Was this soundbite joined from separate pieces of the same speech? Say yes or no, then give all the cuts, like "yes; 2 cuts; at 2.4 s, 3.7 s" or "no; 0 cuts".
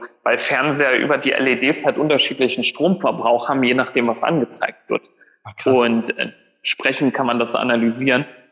no; 0 cuts